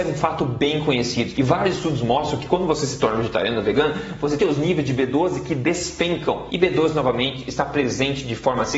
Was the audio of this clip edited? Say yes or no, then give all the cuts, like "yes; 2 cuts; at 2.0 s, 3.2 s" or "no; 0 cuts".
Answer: yes; 1 cut; at 4.4 s